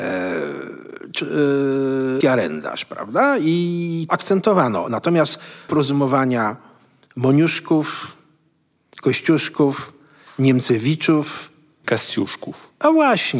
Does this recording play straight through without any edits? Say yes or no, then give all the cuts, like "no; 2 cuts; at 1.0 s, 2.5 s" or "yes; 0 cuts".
no; 5 cuts; at 1.2 s, 2.2 s, 4.1 s, 5.7 s, 11.8 s